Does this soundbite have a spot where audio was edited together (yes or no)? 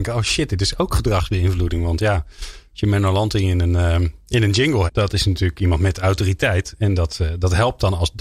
yes